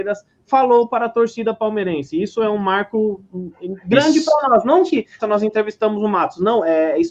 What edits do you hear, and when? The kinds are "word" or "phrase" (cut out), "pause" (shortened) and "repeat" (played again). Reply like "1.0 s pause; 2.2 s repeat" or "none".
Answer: 5.2 s word